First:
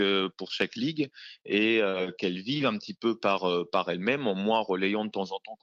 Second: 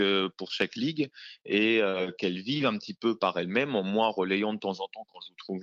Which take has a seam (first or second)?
second